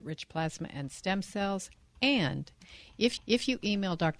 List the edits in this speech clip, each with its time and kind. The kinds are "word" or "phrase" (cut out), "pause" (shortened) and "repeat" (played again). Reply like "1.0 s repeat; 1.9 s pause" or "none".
3.2 s repeat

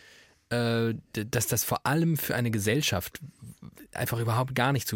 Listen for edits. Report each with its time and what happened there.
none

